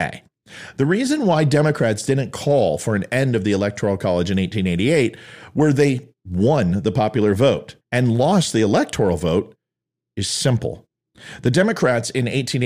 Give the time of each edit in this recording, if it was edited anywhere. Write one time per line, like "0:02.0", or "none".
0:07.8